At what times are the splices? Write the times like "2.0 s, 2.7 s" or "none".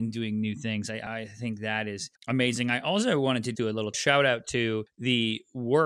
3.5 s